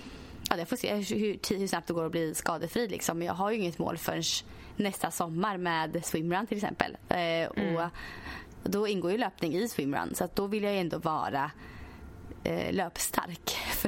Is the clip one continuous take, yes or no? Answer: yes